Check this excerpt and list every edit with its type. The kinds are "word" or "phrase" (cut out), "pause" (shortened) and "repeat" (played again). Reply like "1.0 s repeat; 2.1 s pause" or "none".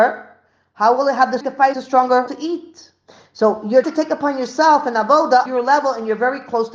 1.4 s word; 1.7 s word; 2.3 s word; 3.8 s word; 5.5 s word